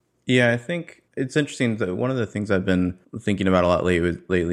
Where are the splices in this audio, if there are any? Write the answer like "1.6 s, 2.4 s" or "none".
1.1 s, 3.0 s